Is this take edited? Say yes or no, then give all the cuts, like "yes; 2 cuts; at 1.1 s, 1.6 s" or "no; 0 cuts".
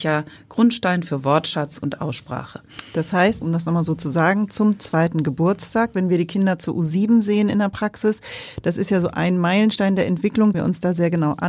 yes; 2 cuts; at 3.4 s, 10.5 s